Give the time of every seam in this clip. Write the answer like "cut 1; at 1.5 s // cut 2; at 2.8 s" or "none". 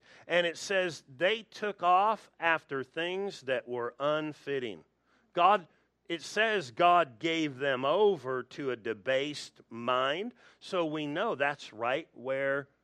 none